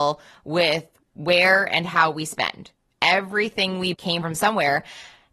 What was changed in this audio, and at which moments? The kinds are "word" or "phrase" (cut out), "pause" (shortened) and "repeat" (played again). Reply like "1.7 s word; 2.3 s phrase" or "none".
3.9 s word